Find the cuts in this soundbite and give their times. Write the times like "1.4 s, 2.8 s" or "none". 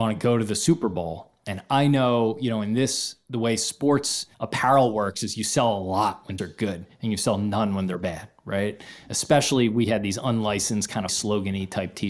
4.3 s, 6.4 s, 11.1 s